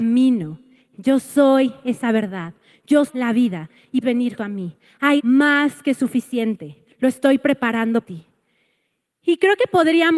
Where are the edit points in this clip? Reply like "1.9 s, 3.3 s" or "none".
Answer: 3.1 s, 4.0 s, 4.4 s, 5.2 s, 8.0 s